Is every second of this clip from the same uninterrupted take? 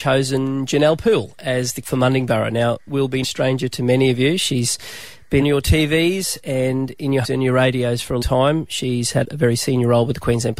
no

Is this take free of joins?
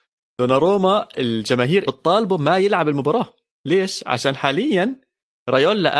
no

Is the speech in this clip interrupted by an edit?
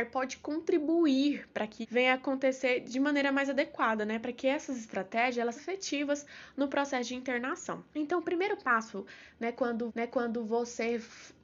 yes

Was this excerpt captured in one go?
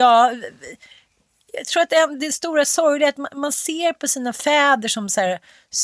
yes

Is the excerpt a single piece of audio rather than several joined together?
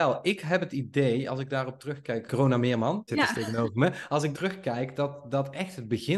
no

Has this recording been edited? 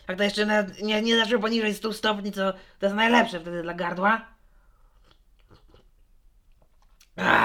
no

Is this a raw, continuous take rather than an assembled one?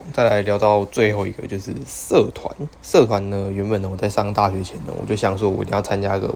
no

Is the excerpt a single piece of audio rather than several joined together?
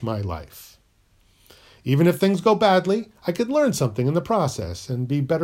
yes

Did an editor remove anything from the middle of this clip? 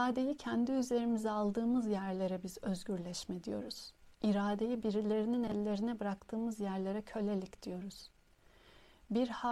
no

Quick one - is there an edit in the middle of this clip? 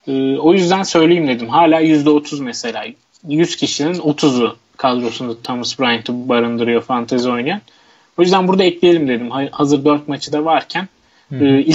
no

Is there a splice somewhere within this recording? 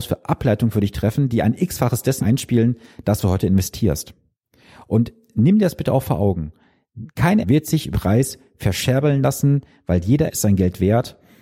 yes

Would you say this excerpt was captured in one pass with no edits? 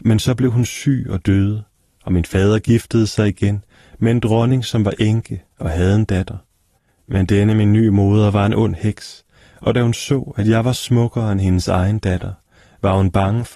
yes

